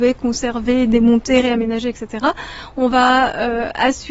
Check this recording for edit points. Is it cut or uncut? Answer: uncut